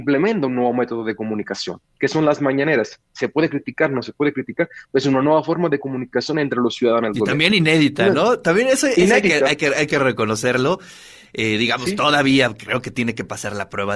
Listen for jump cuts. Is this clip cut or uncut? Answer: uncut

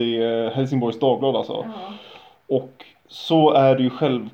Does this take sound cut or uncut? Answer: uncut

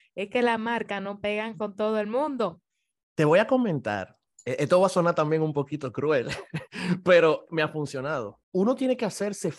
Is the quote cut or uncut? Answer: uncut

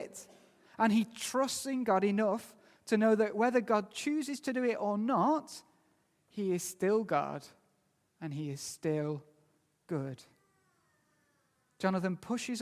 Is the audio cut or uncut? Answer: uncut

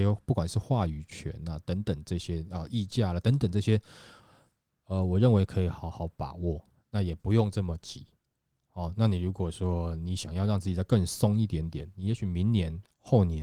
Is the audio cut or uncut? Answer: uncut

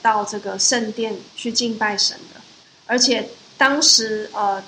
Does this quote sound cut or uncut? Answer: cut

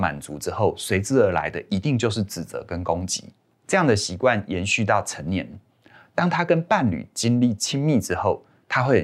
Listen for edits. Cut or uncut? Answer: uncut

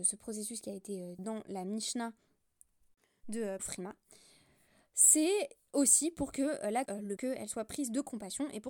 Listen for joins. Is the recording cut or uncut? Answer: cut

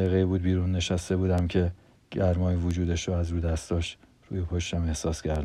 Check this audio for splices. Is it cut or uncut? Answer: uncut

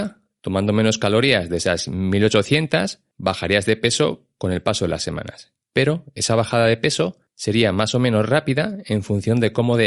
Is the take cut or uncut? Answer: uncut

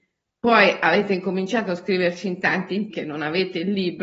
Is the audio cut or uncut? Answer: cut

